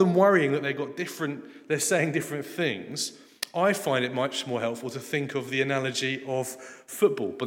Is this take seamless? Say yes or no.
yes